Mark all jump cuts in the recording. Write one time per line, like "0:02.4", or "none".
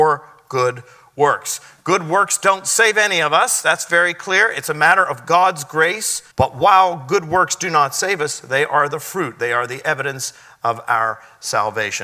0:06.3